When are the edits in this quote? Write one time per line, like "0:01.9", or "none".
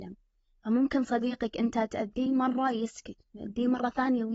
none